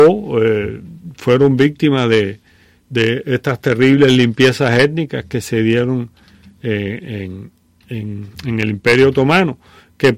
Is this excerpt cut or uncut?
uncut